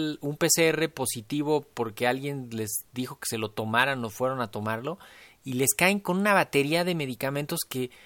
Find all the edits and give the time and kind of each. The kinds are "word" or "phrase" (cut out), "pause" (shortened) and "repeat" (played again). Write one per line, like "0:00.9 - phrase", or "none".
none